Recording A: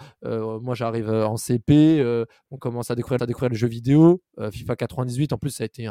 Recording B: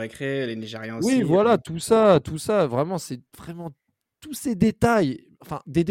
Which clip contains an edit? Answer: A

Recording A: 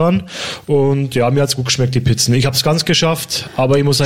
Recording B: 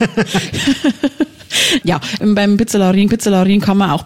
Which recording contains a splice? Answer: B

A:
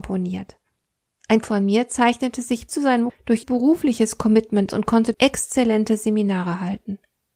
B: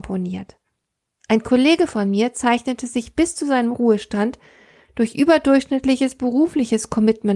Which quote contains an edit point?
A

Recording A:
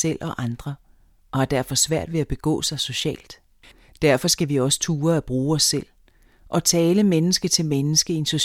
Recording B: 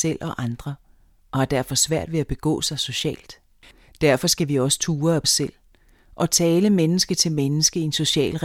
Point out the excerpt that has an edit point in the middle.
B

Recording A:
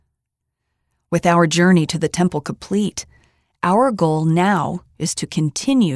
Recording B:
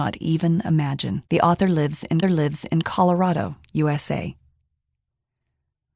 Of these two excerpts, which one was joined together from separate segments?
B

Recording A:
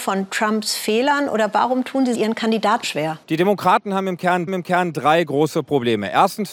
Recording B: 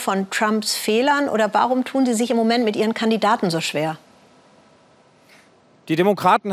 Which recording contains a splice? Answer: A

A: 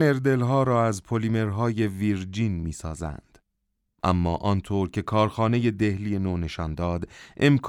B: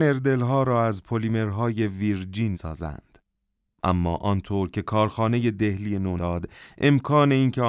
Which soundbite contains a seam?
B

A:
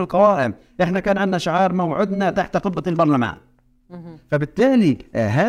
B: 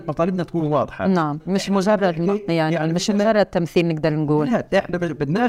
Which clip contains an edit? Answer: B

